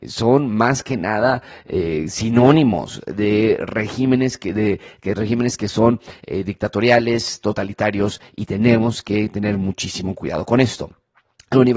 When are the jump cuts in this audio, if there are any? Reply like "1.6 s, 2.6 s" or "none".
none